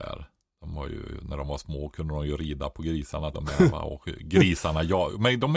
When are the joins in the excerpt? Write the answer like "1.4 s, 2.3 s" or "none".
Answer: 3.3 s